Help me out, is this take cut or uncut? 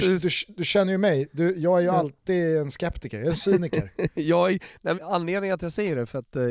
cut